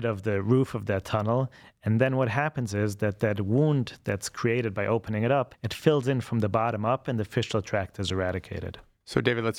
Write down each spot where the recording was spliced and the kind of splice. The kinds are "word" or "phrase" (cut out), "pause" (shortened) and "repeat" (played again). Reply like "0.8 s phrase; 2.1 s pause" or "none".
none